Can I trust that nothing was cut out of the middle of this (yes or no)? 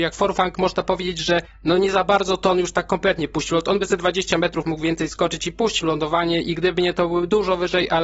yes